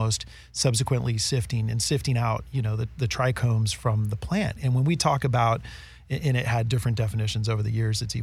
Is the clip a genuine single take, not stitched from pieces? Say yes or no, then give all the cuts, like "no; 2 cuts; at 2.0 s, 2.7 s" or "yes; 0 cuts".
yes; 0 cuts